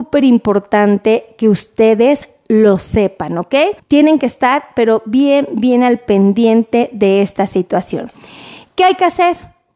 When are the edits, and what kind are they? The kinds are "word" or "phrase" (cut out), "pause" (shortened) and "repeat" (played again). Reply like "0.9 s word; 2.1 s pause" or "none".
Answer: 3.8 s pause

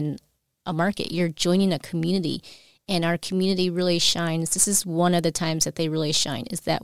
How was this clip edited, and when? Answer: none

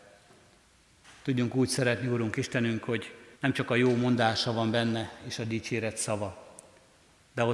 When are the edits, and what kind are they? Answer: 3.4 s pause

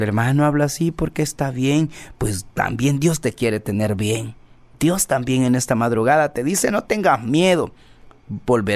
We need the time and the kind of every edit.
none

